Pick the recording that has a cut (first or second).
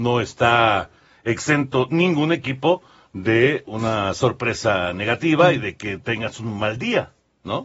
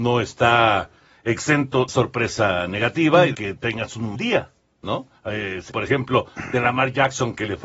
second